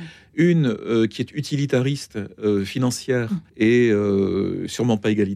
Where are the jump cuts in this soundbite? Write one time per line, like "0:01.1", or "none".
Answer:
0:03.5